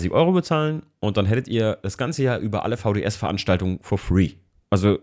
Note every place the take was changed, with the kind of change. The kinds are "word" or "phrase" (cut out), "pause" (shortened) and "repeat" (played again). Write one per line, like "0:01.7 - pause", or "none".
none